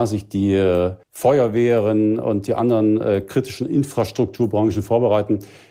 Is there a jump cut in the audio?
yes; 1 cut; at 1.0 s

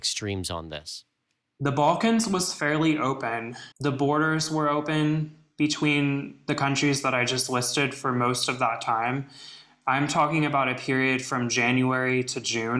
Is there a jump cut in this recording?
yes; 1 cut; at 3.7 s

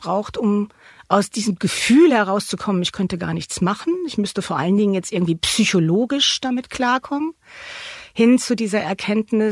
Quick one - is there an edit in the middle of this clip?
no; 0 cuts

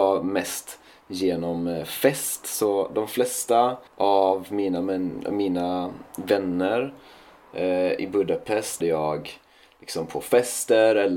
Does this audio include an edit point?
yes; 2 cuts; at 3.9 s, 8.8 s

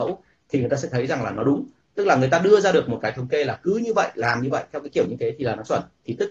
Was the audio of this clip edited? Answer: yes; 1 cut; at 1.8 s

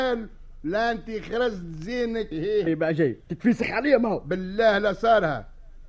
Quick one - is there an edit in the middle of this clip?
yes; 3 cuts; at 2.3 s, 2.7 s, 3.2 s

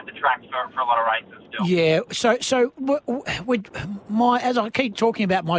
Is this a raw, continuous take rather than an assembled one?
yes; 0 cuts

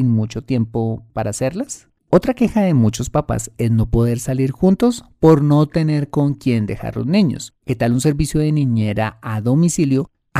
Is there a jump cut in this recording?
yes; 2 cuts; at 2.0 s, 7.5 s

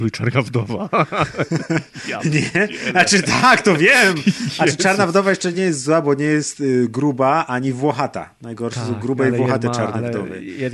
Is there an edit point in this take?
no; 0 cuts

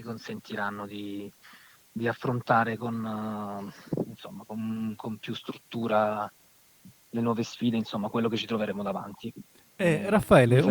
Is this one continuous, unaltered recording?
yes; 0 cuts

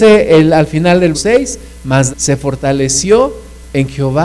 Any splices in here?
yes; 2 cuts; at 1.1 s, 2.1 s

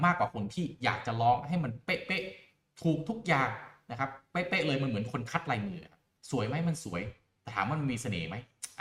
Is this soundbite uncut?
yes; 0 cuts

